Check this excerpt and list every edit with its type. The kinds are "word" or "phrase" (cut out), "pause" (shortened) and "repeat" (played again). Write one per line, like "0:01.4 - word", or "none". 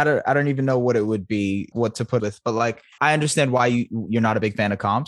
0:01.7 - word
0:02.2 - phrase
0:03.0 - word